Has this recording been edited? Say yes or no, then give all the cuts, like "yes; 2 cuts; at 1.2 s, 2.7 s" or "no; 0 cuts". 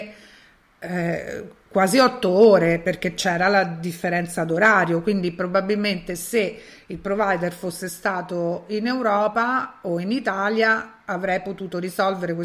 no; 0 cuts